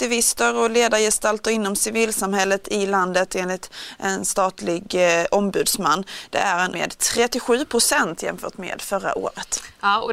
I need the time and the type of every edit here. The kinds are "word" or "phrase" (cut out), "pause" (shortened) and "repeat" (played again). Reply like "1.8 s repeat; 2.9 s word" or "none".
6.7 s word